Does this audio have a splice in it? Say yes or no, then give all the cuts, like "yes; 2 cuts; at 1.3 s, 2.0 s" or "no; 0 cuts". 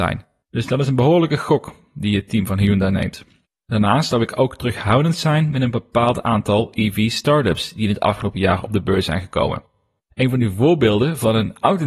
no; 0 cuts